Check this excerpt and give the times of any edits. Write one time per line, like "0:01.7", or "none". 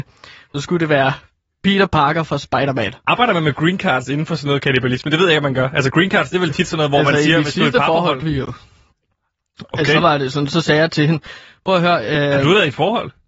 0:08.2

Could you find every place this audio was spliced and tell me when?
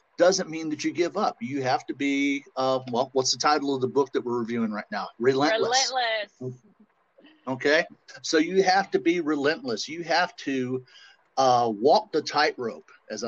none

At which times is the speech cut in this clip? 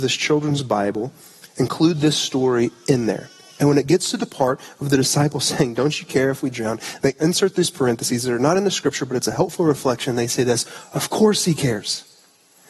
none

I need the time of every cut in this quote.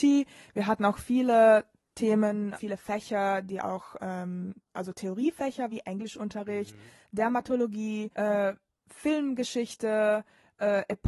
0:02.5
0:04.6
0:05.7
0:08.1

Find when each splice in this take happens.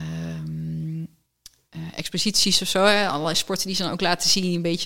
none

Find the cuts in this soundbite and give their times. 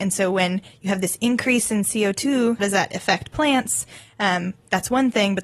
0:02.6

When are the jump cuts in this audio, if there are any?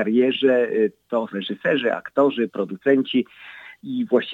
0:01.3

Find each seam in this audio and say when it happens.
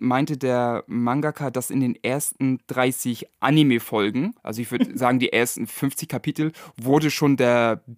0:04.4

